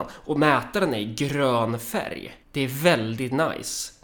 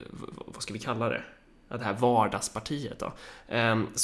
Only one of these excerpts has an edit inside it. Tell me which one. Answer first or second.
first